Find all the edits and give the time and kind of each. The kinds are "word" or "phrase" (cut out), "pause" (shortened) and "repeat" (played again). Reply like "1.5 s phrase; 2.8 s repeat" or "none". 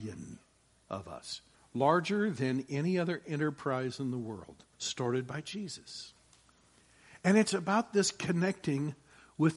1.5 s pause; 4.7 s pause